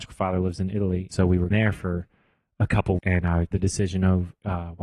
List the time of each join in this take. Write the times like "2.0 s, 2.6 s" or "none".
1.1 s, 1.5 s, 3.0 s, 3.5 s